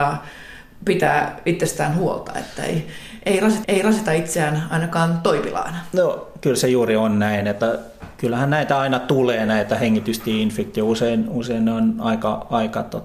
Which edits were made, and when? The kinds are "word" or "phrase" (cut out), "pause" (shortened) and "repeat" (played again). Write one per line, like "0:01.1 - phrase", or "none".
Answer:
0:03.6 - repeat

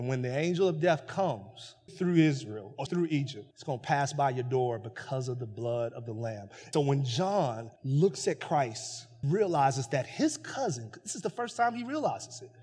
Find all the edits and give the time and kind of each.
0:01.9 - word
0:02.9 - word
0:03.5 - pause
0:06.7 - word
0:07.8 - pause
0:09.2 - word

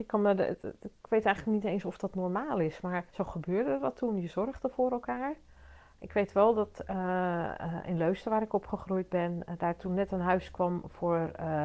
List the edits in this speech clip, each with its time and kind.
0:03.1 - pause

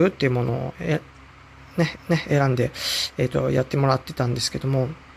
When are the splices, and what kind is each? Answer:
0:01.9 - repeat

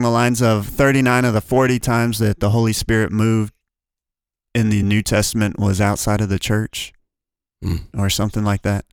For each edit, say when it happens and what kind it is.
none

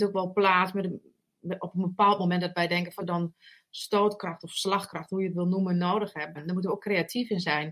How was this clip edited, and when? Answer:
0:03.0 - word
0:06.3 - word

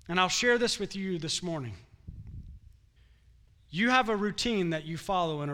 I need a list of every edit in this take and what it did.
0:03.0 - pause

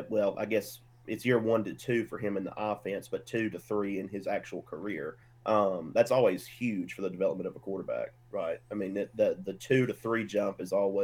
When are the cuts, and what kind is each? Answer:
0:05.2 - pause

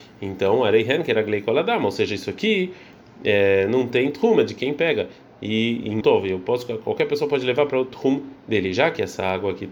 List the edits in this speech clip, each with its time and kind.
0:06.0 - word

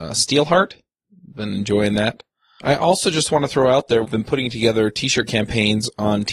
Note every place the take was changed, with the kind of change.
0:04.1 - word

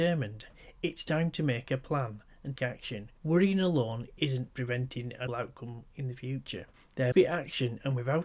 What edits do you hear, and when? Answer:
0:02.6 - word
0:03.2 - pause
0:05.3 - word
0:07.1 - word

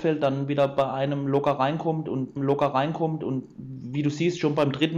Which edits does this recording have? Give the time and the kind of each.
0:02.4 - repeat

